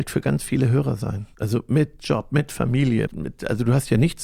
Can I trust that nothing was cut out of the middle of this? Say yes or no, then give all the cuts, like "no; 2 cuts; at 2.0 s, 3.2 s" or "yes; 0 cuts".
no; 2 cuts; at 1.3 s, 3.1 s